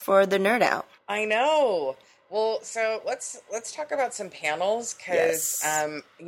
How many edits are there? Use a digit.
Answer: 1